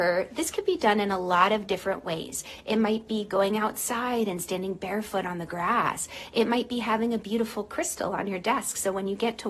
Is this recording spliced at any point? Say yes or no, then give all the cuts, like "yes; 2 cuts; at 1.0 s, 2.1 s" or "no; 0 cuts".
no; 0 cuts